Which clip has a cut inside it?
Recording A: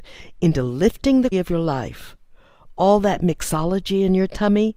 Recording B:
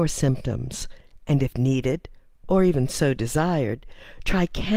A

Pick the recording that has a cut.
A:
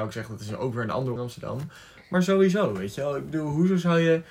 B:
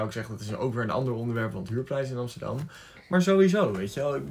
A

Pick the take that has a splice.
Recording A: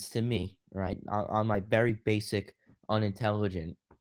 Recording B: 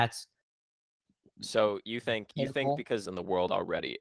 B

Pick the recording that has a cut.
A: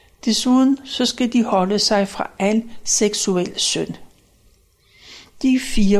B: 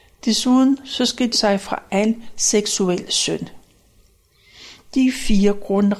B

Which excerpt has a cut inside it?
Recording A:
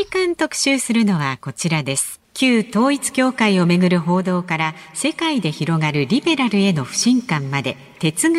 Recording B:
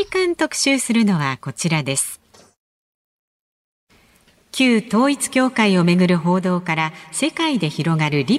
A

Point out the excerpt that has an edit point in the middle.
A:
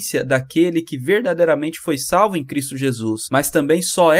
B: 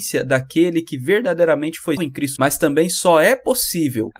B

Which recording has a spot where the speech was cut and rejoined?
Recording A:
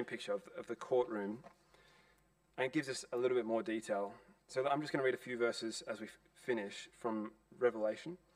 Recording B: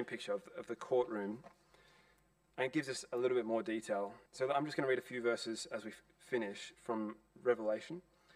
B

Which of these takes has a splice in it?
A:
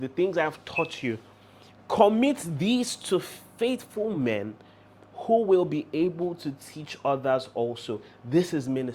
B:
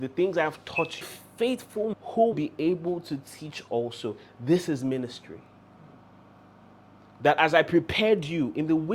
B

